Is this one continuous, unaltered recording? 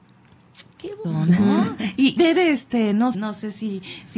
no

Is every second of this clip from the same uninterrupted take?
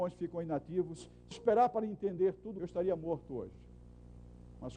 no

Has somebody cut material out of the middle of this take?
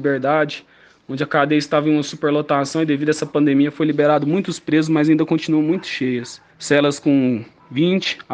yes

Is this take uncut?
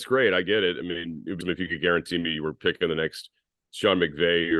no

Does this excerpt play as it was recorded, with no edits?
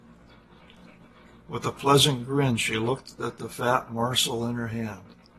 yes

